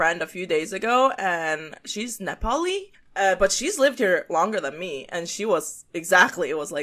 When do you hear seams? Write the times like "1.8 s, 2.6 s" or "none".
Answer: 2.9 s